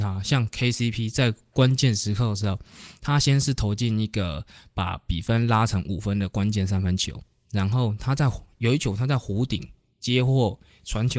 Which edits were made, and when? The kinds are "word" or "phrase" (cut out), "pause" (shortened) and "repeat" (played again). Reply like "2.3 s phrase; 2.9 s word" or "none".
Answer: none